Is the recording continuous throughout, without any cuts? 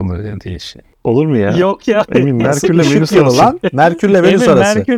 yes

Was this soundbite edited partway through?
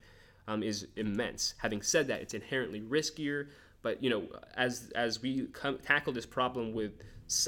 no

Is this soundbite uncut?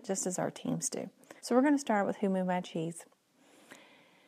no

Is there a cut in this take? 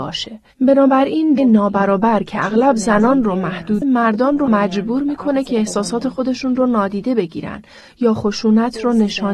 yes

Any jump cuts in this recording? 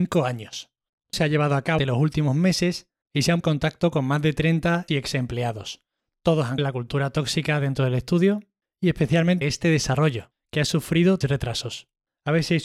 yes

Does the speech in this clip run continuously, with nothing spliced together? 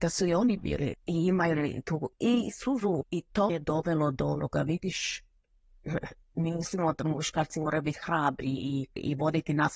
no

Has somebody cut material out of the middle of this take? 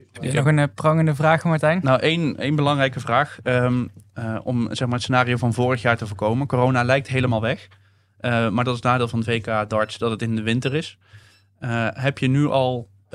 no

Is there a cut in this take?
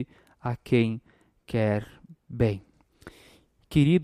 no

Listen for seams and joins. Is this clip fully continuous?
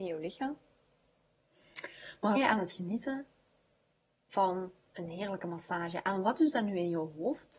no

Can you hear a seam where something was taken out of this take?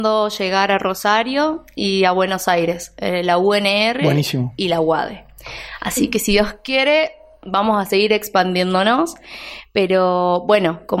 no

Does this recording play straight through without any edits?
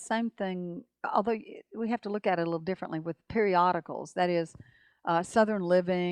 yes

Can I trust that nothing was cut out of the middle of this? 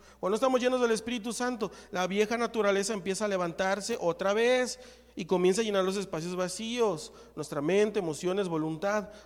yes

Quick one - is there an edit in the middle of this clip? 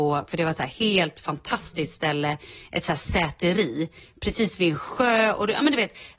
no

